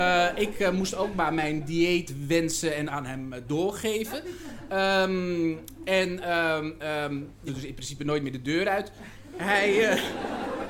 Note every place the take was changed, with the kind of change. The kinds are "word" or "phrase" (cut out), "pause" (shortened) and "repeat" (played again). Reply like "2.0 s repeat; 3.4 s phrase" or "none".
2.9 s word; 7.5 s phrase

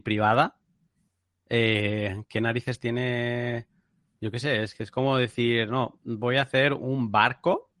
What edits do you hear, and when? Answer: none

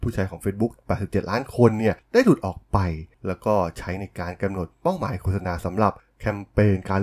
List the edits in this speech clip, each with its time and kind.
3.1 s pause

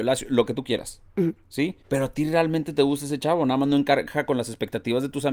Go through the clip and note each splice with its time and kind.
1.8 s pause

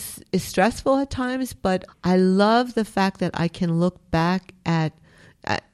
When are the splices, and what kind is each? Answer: 1.9 s word

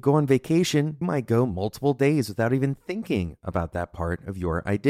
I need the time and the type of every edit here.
1.0 s word

